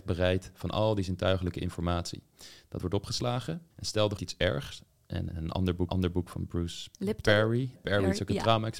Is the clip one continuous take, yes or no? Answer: no